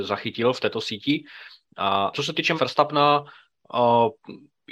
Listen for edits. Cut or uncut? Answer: cut